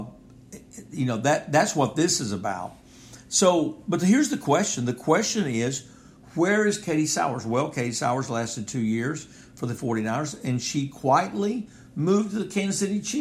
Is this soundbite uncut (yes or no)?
yes